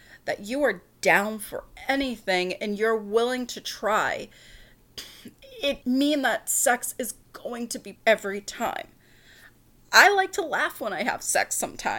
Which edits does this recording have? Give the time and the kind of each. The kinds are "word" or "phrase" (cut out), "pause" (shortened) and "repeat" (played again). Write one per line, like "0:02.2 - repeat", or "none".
0:05.8 - word
0:08.0 - word